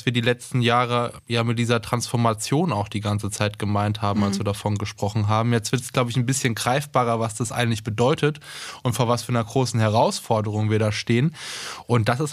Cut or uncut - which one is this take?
uncut